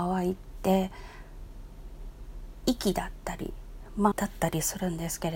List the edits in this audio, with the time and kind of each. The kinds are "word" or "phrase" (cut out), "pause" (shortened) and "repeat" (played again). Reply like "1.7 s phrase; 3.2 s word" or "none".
4.1 s word